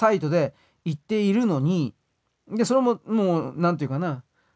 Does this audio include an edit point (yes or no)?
no